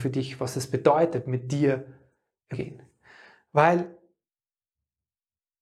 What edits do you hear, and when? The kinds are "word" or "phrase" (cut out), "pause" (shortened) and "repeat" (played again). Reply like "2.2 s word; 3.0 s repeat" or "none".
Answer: 2.5 s word